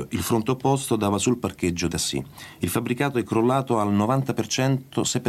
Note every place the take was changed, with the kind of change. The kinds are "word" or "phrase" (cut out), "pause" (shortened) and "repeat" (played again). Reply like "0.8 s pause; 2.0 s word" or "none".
1.9 s word

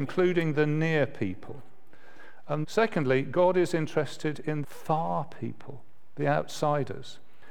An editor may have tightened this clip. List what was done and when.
2.6 s word; 4.6 s word

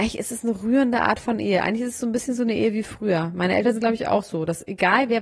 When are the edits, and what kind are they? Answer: none

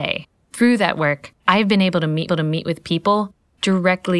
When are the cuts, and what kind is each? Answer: 1.4 s pause; 2.3 s repeat

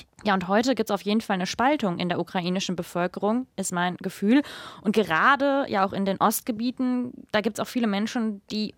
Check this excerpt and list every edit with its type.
none

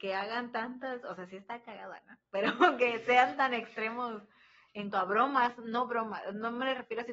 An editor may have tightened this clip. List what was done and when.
4.9 s word

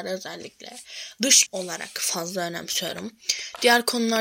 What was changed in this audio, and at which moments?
1.5 s word

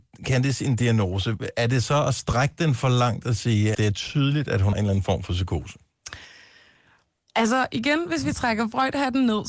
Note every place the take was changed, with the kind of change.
3.7 s word; 4.7 s word

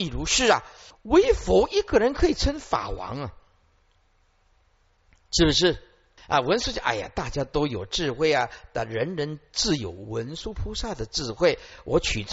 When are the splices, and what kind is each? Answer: none

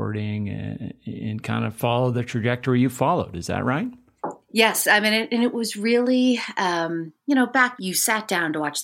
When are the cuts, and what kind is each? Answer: 7.8 s word

